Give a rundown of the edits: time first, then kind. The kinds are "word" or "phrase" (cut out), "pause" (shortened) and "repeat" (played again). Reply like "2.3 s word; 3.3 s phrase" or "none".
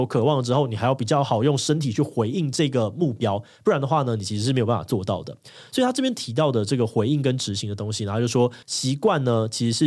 8.6 s pause